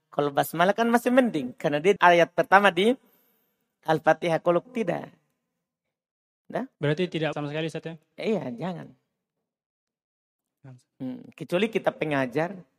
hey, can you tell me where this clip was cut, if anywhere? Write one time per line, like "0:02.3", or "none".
0:02.0
0:04.6
0:06.7
0:07.3